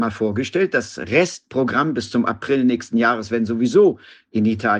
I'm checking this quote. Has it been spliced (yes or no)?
no